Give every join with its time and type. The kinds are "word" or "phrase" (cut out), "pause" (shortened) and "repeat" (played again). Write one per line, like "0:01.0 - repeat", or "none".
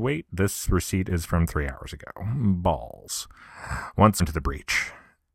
0:04.2 - word